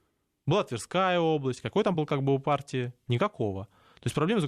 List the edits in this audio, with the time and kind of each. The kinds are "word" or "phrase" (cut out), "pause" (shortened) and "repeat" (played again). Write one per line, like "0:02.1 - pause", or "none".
0:01.9 - word

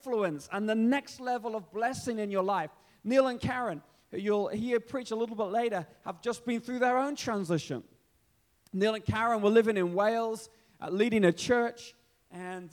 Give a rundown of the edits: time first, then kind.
none

